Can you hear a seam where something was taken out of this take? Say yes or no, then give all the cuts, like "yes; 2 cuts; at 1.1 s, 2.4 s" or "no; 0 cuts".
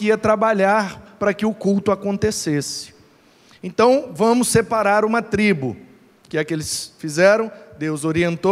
no; 0 cuts